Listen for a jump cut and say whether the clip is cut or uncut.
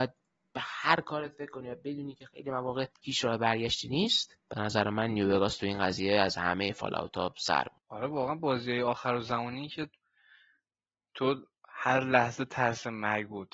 cut